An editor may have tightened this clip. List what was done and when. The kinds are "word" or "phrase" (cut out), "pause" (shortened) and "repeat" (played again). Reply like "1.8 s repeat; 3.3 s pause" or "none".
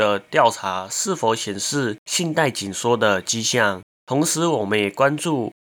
2.0 s pause; 3.9 s pause